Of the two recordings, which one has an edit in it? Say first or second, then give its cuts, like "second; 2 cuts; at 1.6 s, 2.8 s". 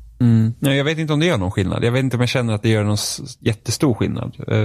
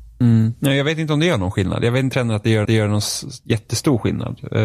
second; 2 cuts; at 2.1 s, 2.6 s